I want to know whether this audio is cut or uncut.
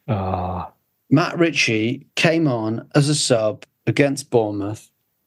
cut